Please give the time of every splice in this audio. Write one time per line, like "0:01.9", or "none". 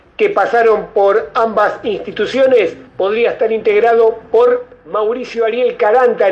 0:02.9